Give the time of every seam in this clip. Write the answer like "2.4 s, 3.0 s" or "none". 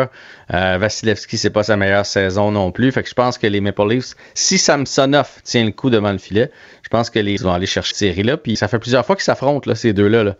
7.4 s, 7.9 s, 8.5 s